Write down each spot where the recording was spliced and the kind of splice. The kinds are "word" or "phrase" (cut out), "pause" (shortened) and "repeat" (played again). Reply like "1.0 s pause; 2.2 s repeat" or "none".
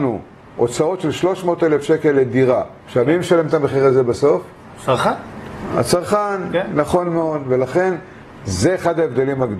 2.8 s pause